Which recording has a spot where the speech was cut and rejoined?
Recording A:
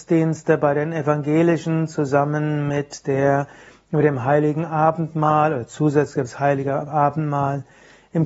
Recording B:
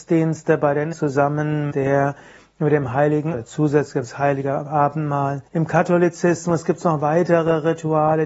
B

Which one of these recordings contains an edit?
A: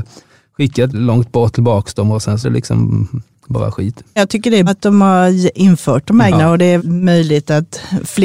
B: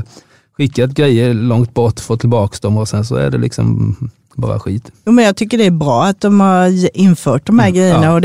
A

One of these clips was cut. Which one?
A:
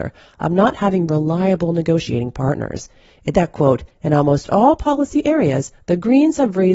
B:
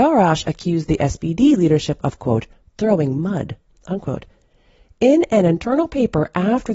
A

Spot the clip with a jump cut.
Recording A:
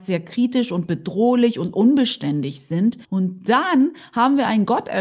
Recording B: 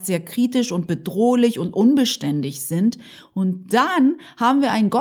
A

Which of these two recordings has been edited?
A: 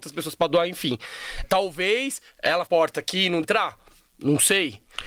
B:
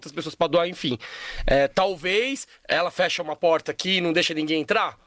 A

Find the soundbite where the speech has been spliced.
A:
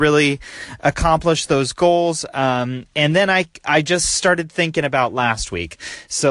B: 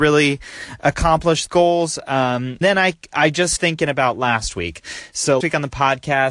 B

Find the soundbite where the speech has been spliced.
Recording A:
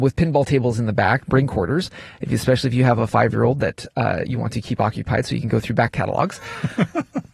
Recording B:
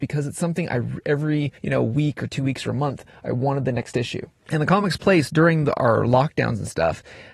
B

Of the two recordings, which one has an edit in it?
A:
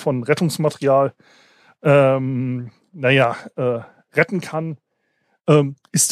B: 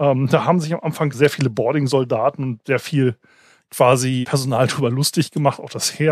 B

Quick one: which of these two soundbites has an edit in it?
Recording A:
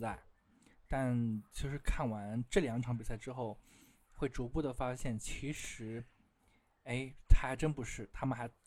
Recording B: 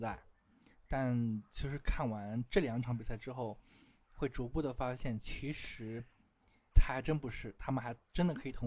B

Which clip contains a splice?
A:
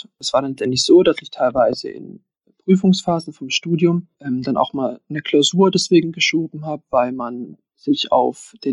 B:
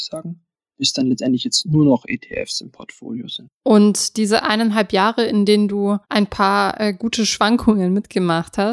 B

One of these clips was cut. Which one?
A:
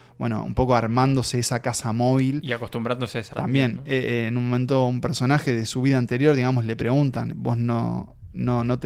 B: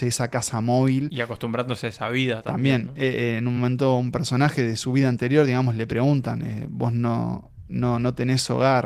A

